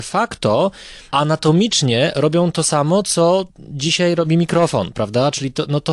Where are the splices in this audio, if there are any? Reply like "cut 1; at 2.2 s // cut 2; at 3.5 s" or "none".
cut 1; at 3.5 s